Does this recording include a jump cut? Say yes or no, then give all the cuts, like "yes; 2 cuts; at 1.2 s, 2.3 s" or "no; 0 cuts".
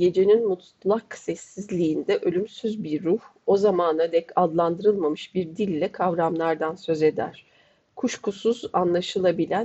no; 0 cuts